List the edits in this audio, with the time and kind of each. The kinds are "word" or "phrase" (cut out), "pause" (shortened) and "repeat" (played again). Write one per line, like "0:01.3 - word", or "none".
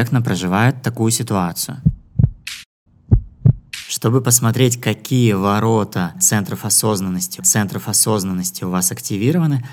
0:07.4 - repeat

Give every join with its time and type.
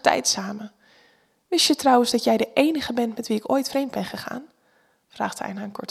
none

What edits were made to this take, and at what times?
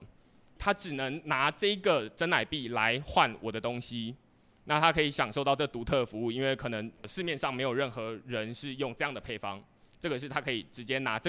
none

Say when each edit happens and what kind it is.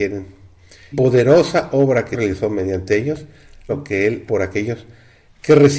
0:00.9 - word
0:02.1 - word
0:03.7 - word
0:04.3 - word

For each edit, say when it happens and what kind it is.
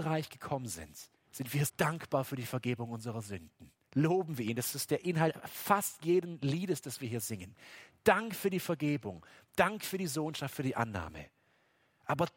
0:01.1 - pause
0:01.7 - word
0:03.8 - pause

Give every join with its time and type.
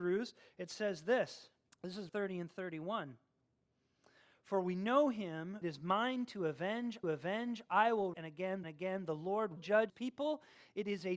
0:01.7 - pause
0:02.1 - word
0:05.6 - phrase
0:07.0 - repeat
0:08.1 - word
0:08.6 - repeat
0:09.6 - word
0:09.9 - word

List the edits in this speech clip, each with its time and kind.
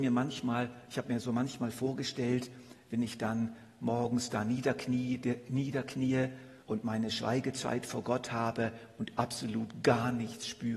0:06.6 - pause

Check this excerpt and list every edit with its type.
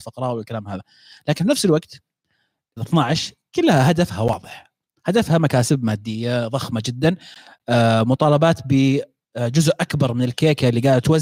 0:02.8 - word

